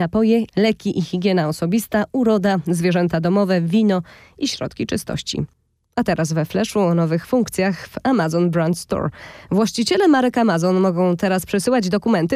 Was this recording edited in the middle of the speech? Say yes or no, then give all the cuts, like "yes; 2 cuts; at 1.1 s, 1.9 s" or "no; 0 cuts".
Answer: no; 0 cuts